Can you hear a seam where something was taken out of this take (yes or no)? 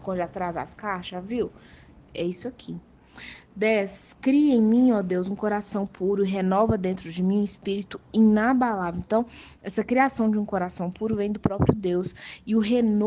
no